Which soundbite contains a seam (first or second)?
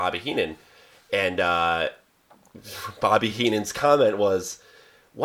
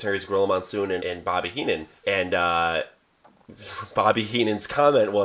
second